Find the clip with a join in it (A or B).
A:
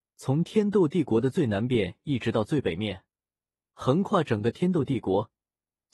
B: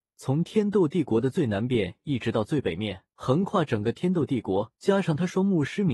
B